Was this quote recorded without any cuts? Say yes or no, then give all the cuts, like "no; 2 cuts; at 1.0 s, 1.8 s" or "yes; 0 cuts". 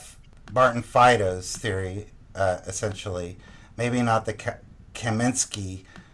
yes; 0 cuts